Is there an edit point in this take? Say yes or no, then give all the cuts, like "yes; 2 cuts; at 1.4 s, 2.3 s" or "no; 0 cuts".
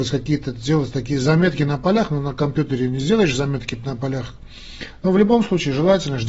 no; 0 cuts